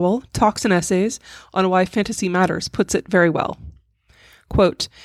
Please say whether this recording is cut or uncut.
uncut